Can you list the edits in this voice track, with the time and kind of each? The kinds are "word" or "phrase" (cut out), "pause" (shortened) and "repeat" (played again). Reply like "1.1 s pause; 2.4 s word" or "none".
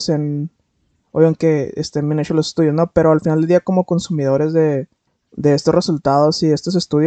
5.1 s pause